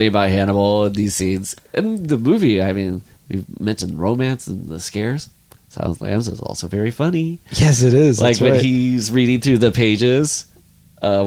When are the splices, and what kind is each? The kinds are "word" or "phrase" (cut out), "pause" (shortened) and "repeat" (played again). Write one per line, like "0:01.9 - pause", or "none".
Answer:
none

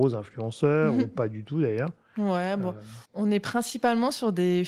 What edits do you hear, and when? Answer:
0:03.1 - pause

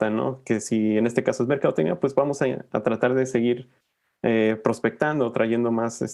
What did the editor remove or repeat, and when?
none

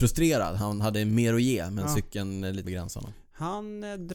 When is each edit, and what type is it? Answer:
0:02.6 - word

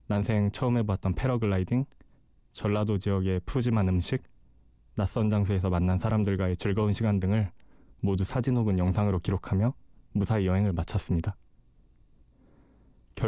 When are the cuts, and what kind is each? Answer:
none

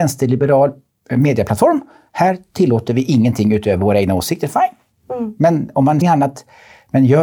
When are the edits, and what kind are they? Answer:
0:06.0 - phrase

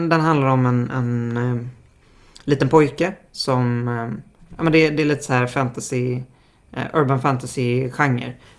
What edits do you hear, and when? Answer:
none

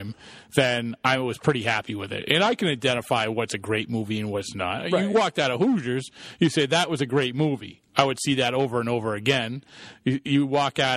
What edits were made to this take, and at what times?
none

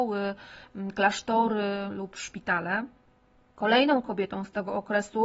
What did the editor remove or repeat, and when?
none

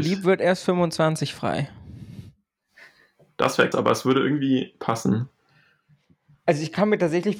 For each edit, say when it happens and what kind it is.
0:03.7 - word

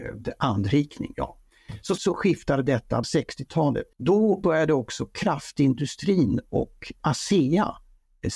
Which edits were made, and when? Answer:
0:02.0 - word
0:03.0 - phrase
0:03.9 - pause
0:07.0 - word

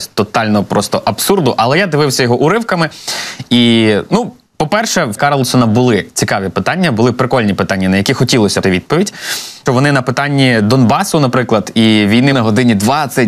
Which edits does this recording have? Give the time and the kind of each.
0:05.2 - word
0:08.6 - word
0:09.7 - phrase
0:12.3 - phrase

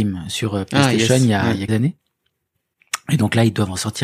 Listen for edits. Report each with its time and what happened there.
0:01.7 - word

